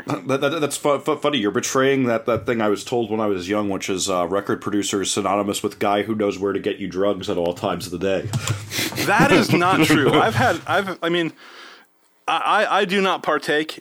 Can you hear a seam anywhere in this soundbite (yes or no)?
no